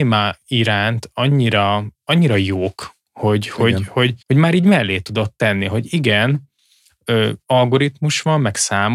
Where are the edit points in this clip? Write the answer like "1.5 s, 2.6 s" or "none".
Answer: 1.9 s, 4.2 s